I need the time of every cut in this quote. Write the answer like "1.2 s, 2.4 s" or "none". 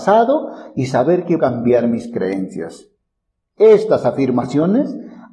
1.4 s